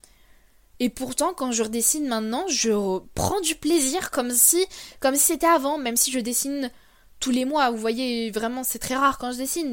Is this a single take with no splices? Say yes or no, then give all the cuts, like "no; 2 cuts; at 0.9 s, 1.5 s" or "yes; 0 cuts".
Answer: yes; 0 cuts